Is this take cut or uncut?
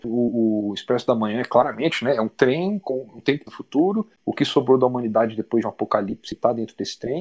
cut